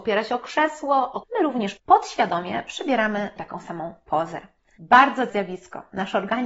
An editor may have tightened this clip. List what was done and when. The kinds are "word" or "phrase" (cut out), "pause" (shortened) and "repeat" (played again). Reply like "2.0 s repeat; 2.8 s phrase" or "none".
1.2 s word; 1.8 s word; 3.4 s word; 5.3 s word